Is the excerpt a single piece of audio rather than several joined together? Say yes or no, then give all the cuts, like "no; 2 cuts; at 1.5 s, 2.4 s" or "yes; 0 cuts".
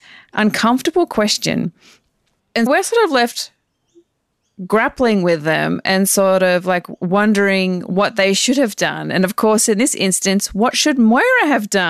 no; 1 cut; at 2.7 s